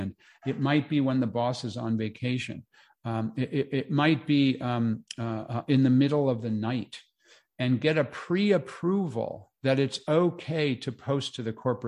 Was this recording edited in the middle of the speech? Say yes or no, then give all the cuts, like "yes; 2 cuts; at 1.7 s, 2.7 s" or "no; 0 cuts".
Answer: no; 0 cuts